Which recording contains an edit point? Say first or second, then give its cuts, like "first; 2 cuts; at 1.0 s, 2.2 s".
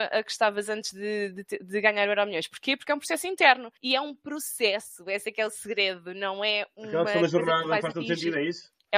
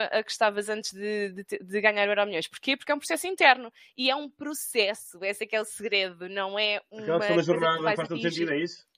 first; 1 cut; at 3.8 s